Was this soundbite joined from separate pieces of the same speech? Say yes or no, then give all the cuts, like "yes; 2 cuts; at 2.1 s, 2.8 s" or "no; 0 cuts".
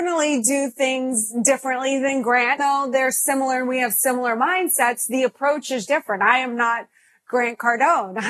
yes; 2 cuts; at 2.6 s, 5.9 s